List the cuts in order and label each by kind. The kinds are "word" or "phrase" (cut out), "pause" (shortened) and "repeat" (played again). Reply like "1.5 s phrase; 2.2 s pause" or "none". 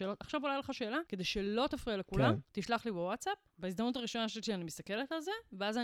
1.1 s pause; 2.4 s pause; 3.5 s pause